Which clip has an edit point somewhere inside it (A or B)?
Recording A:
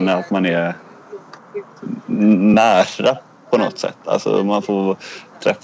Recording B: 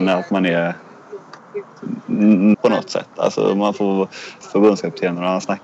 B